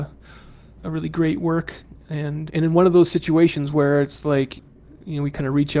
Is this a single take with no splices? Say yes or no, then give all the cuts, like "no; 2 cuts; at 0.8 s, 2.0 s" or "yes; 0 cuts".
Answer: no; 1 cut; at 2.5 s